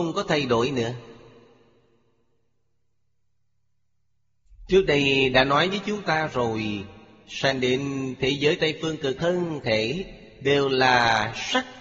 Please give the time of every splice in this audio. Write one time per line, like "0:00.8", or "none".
0:09.2